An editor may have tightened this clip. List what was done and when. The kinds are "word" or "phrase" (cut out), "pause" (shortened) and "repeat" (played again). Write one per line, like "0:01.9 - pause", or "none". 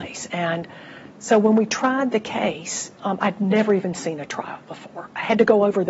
0:02.9 - pause